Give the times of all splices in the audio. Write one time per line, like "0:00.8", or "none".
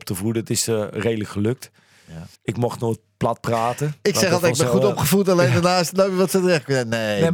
0:02.4